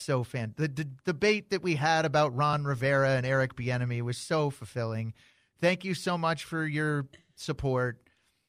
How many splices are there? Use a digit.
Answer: 0